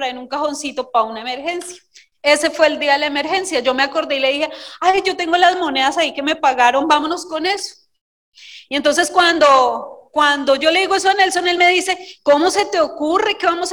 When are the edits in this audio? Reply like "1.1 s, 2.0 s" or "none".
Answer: none